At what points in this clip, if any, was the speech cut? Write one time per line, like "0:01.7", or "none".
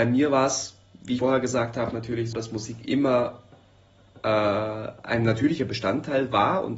0:01.2
0:02.3